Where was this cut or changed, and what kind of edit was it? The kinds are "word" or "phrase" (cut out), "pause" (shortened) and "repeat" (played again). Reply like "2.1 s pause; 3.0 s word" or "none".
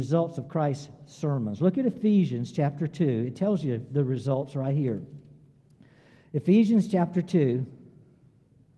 none